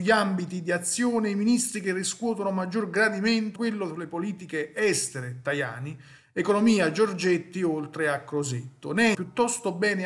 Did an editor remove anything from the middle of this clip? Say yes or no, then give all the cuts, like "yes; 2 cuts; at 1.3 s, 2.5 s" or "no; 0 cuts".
yes; 2 cuts; at 3.6 s, 9.1 s